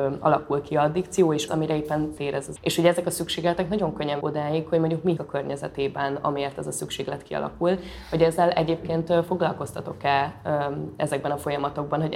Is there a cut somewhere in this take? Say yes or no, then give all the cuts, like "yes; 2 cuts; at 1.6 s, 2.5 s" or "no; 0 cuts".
yes; 5 cuts; at 1.5 s, 2.2 s, 2.6 s, 4.2 s, 5.2 s